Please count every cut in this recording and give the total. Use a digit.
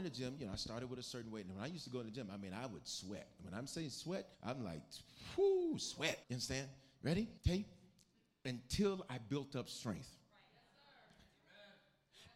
3